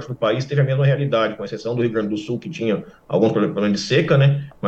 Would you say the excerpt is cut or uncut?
uncut